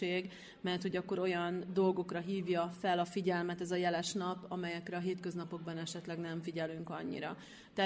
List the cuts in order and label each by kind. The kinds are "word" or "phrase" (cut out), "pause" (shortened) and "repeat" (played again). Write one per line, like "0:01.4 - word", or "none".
none